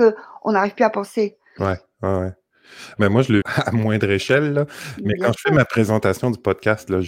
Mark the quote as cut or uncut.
cut